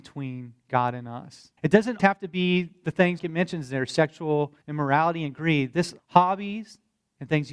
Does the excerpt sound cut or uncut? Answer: cut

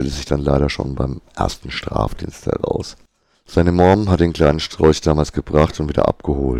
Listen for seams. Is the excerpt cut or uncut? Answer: uncut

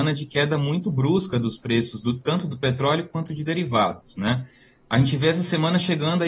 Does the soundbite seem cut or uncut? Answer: uncut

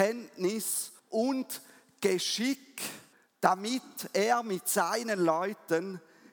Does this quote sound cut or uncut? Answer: cut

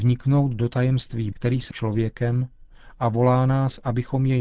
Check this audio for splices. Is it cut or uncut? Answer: cut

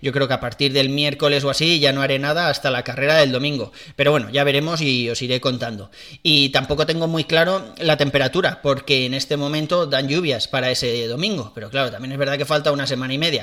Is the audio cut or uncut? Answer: uncut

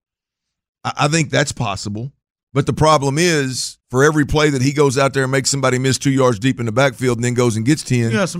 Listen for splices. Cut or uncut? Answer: cut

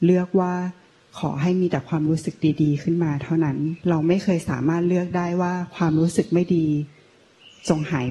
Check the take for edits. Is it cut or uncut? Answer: cut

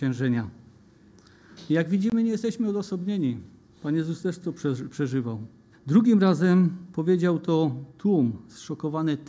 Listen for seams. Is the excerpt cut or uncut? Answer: cut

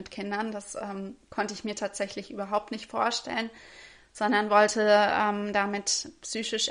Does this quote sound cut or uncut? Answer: uncut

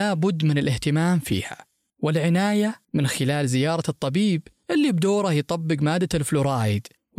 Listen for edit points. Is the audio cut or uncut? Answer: uncut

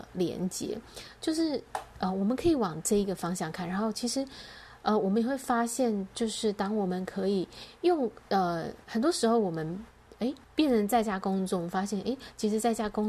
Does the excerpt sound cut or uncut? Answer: cut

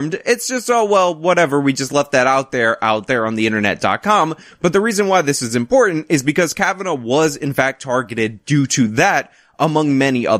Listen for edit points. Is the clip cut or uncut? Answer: uncut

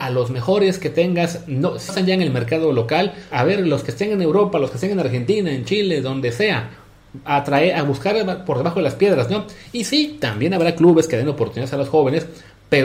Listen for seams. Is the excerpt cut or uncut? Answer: cut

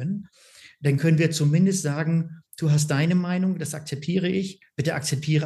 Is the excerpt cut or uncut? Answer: uncut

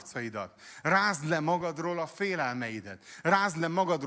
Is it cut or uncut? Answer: uncut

